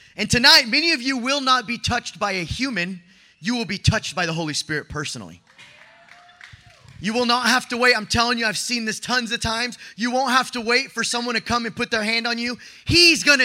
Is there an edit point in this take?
no; 0 cuts

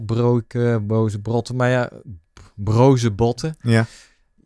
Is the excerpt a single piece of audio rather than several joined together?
yes; 0 cuts

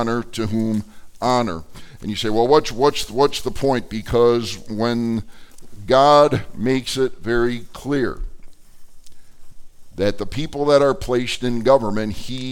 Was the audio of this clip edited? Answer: no; 0 cuts

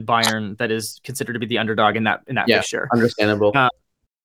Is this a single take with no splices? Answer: yes; 0 cuts

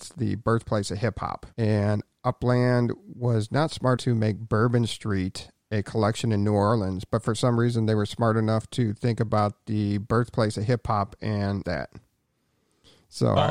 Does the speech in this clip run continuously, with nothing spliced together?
no; 3 cuts; at 1.5 s, 4.0 s, 11.6 s

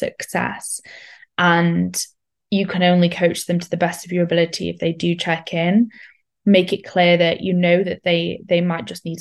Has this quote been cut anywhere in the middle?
no; 0 cuts

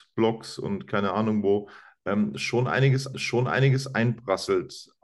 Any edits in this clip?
yes; 1 cut; at 3.1 s

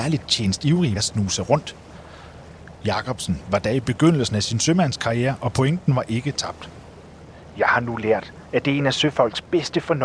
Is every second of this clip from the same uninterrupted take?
no; 1 cut; at 1.0 s

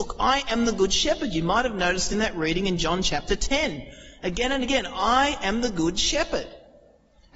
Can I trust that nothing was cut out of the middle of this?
yes; 0 cuts

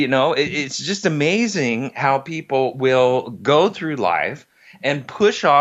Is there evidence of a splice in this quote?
no; 0 cuts

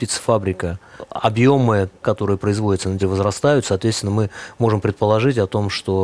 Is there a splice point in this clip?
yes; 2 cuts; at 2.0 s, 3.0 s

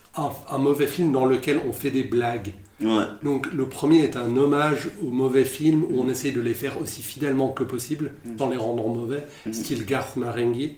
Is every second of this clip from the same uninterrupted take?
no; 1 cut; at 8.4 s

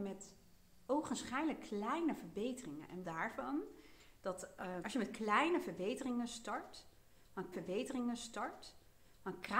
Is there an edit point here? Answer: yes; 3 cuts; at 3.0 s, 4.8 s, 7.5 s

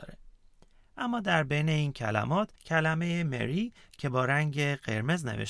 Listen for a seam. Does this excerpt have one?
yes; 1 cut; at 2.6 s

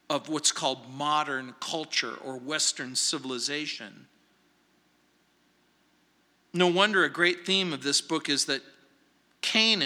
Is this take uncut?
yes; 0 cuts

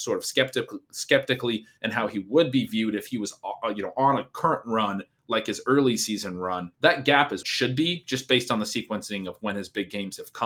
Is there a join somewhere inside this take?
yes; 2 cuts; at 6.7 s, 7.4 s

